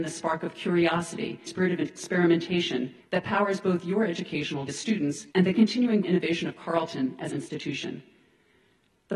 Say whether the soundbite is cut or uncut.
cut